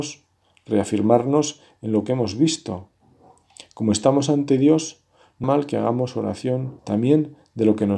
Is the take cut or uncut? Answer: cut